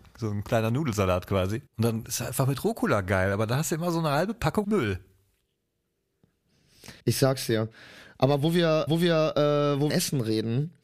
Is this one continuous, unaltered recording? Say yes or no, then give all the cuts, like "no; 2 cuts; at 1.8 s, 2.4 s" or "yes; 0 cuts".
no; 5 cuts; at 1.7 s, 4.6 s, 7.0 s, 8.9 s, 9.9 s